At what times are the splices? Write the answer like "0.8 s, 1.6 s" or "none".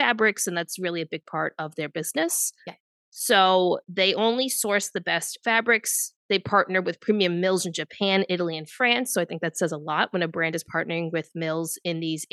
none